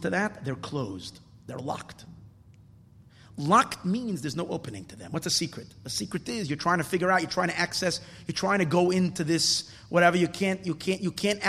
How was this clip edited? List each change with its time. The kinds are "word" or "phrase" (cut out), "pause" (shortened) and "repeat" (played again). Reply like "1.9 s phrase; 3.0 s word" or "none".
none